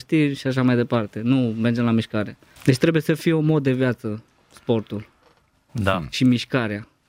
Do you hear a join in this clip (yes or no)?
yes